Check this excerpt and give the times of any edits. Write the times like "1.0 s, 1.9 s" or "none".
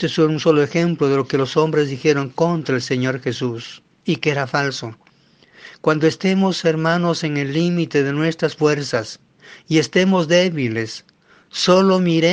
3.9 s